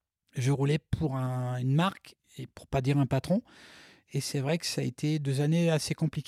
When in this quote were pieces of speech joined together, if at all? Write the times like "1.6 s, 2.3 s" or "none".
none